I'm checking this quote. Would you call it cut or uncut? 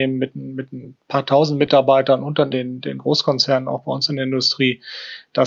cut